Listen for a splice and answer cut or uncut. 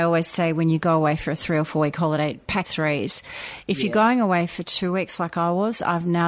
cut